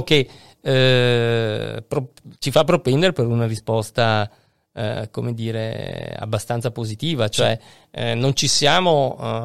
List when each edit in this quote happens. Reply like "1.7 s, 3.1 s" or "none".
none